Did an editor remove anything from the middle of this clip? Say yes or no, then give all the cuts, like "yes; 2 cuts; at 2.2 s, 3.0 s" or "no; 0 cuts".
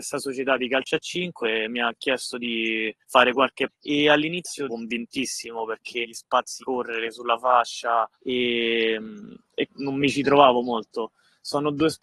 yes; 7 cuts; at 3.0 s, 3.7 s, 4.7 s, 6.0 s, 6.6 s, 8.1 s, 9.7 s